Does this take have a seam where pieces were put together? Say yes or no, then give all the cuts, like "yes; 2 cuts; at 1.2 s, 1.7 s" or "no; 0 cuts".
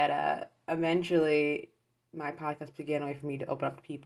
no; 0 cuts